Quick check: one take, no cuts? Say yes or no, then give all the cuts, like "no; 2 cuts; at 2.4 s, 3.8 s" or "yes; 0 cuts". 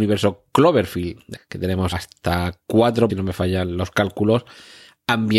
no; 3 cuts; at 1.4 s, 1.9 s, 3.1 s